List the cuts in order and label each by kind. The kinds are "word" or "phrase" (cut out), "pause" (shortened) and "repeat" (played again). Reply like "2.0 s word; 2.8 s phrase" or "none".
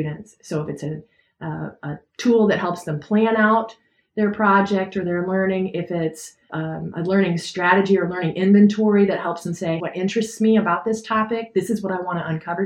6.5 s word; 9.8 s phrase